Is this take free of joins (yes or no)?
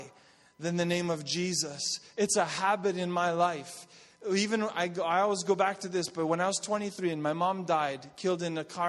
yes